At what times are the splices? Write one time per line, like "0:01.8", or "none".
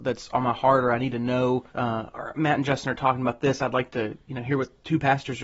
0:01.7